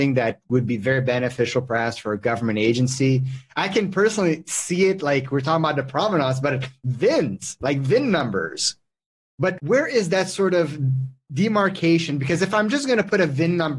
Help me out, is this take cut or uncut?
uncut